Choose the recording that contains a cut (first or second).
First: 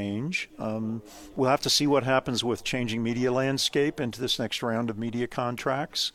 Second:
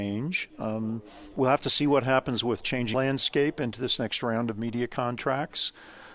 second